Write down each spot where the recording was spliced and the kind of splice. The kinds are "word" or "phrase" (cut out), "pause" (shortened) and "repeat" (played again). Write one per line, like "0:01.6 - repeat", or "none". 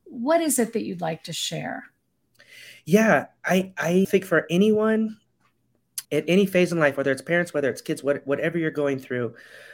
0:04.0 - word
0:06.0 - pause